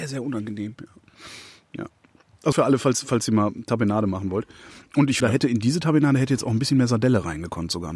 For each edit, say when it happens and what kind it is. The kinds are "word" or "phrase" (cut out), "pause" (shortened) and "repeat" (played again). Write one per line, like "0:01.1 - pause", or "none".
0:02.5 - word
0:05.2 - word